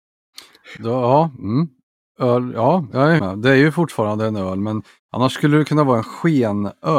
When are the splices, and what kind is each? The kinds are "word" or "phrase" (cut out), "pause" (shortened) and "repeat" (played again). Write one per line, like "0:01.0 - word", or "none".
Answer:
0:03.2 - word